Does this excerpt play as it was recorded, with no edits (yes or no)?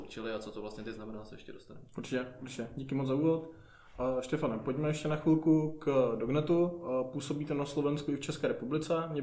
yes